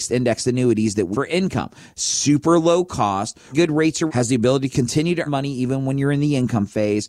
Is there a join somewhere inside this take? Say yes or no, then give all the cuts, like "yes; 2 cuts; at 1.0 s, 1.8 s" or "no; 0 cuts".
yes; 4 cuts; at 1.1 s, 3.5 s, 4.1 s, 5.3 s